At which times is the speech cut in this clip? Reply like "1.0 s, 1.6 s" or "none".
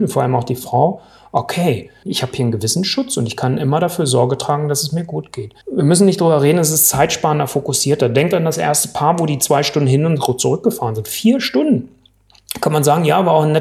2.0 s, 5.6 s